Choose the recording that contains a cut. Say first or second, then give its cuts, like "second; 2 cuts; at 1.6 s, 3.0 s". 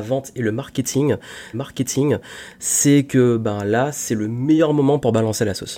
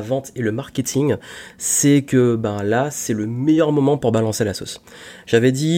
first; 1 cut; at 1.5 s